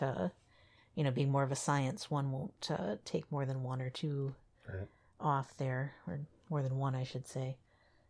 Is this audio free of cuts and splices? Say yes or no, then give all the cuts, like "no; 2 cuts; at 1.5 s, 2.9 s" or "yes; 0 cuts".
yes; 0 cuts